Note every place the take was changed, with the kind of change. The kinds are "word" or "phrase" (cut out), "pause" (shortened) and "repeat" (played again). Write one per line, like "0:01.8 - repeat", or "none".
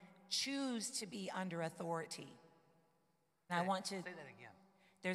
0:03.5 - word

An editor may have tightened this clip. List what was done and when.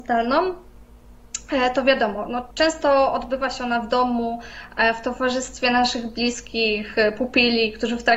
0:02.5 - pause

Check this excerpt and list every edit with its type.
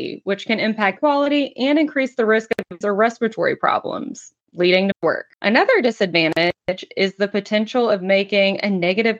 0:01.0 - word
0:02.8 - word
0:04.9 - word
0:05.3 - pause

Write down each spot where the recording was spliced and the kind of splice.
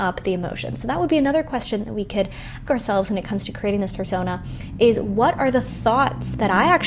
0:02.7 - word

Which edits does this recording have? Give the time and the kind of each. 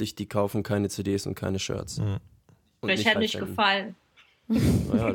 0:03.2 - phrase

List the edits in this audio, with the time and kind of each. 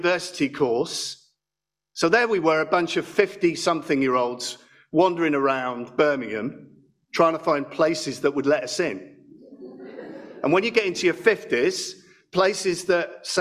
none

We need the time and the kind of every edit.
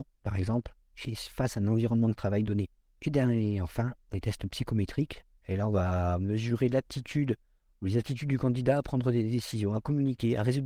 none

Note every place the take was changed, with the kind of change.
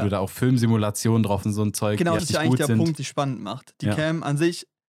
0:01.4 - word
0:02.2 - word
0:03.0 - word

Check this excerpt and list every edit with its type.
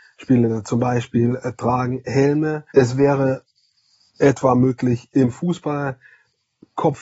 0:02.7 - pause

